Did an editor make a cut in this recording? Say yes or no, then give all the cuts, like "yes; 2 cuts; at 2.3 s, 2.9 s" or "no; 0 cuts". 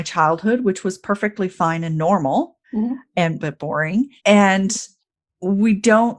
yes; 3 cuts; at 2.6 s, 3.4 s, 4.2 s